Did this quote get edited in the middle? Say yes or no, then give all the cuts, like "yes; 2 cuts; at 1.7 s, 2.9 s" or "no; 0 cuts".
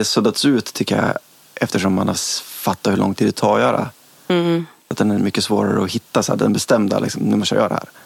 no; 0 cuts